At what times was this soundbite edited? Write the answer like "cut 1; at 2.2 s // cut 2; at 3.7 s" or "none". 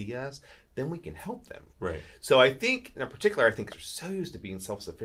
cut 1; at 1.7 s // cut 2; at 2.9 s // cut 3; at 3.7 s